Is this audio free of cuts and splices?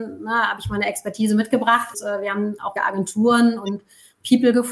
no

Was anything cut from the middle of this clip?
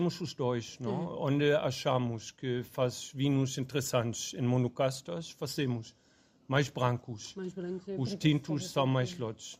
no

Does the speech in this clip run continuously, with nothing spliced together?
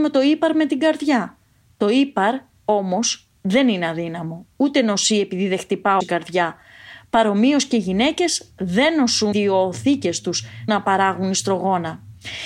no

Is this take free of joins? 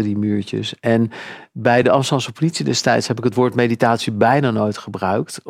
yes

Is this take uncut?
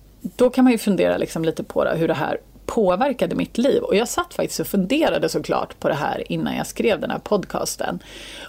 yes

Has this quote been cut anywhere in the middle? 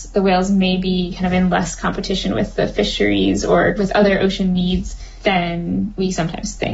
no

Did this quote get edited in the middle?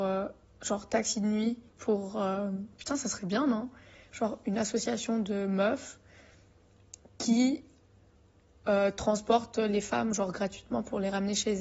yes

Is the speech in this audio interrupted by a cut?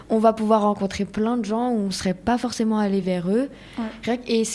no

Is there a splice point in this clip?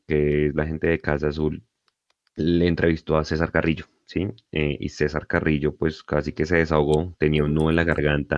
no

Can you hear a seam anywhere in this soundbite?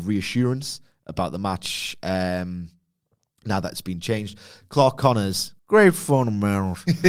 yes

